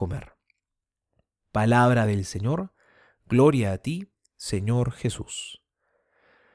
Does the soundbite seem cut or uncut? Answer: uncut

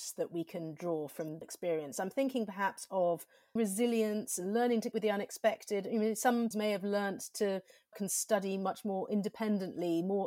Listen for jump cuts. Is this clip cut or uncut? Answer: cut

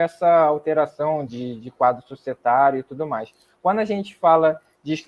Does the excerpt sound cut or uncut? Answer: uncut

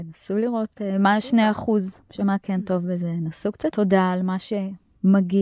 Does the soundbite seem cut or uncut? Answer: cut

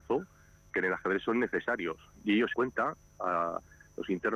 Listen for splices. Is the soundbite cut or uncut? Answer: cut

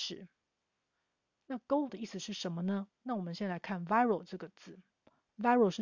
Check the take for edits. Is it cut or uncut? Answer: cut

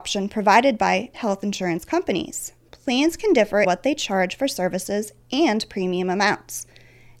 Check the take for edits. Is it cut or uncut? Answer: cut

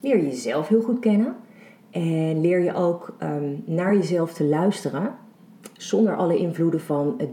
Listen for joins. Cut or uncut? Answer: uncut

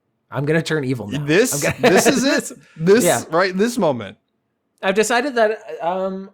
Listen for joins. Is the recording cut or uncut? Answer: uncut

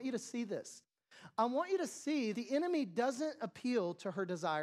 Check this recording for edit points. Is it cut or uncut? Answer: cut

